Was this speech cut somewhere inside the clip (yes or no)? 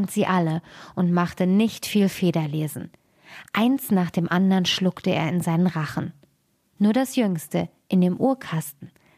no